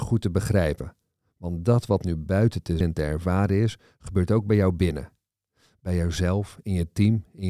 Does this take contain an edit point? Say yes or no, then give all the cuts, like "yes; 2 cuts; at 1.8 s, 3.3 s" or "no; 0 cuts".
yes; 1 cut; at 2.8 s